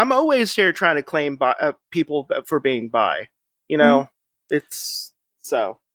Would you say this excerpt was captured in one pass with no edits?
yes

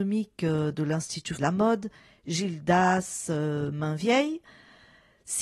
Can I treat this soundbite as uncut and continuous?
no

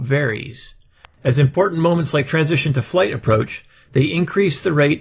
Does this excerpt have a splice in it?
no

